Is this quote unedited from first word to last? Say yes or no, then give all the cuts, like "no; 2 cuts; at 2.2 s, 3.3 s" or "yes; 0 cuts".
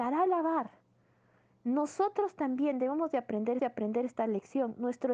no; 1 cut; at 3.6 s